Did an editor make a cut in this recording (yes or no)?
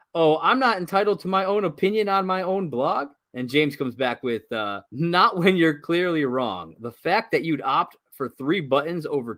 yes